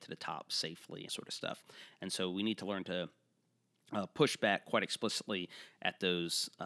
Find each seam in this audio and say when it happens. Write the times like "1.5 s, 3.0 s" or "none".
1.1 s